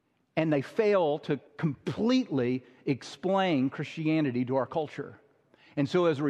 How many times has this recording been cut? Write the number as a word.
one